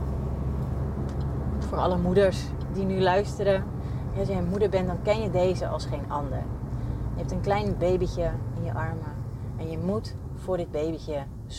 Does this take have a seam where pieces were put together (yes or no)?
no